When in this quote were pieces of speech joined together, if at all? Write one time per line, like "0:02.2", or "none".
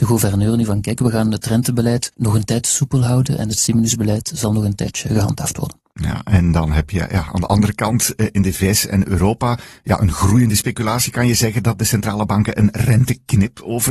0:02.1